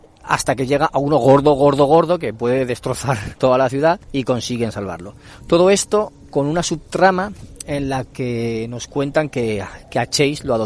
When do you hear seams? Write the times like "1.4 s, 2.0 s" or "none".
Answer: 4.0 s